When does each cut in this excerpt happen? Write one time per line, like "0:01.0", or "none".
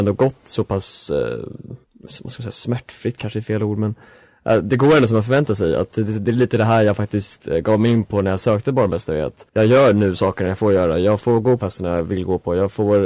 0:01.8
0:11.6